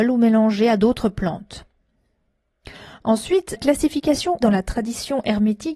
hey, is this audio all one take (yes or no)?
no